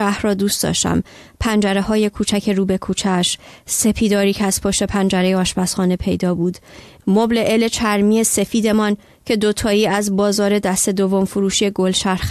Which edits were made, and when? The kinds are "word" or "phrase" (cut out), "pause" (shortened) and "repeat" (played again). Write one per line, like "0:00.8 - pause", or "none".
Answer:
none